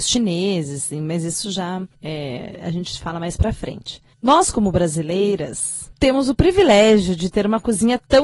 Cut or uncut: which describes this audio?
uncut